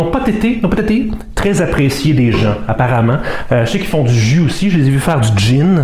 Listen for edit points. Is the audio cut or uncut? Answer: uncut